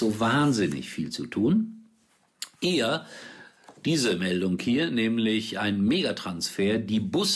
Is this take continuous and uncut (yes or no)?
no